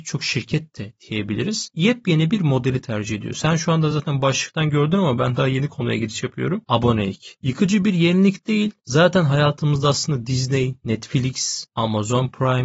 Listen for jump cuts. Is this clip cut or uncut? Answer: uncut